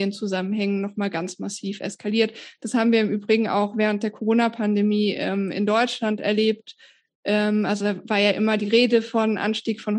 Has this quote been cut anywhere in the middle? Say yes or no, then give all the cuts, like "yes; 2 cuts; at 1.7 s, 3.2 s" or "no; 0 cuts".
no; 0 cuts